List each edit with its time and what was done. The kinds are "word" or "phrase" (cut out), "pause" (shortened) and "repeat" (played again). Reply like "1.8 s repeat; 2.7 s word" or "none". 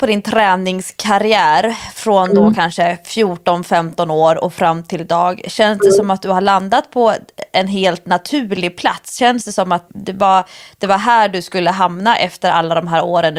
9.9 s word